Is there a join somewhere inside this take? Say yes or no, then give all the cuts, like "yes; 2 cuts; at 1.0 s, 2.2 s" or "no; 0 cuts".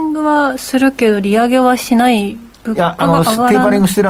yes; 1 cut; at 2.5 s